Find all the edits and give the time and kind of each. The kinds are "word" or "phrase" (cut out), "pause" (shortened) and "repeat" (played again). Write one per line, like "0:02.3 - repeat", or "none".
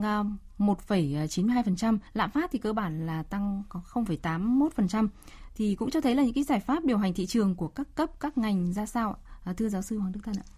0:02.1 - pause